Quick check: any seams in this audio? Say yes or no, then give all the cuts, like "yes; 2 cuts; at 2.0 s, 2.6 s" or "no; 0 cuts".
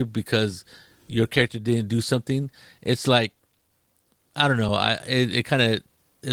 no; 0 cuts